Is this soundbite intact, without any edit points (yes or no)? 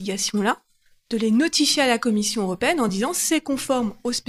yes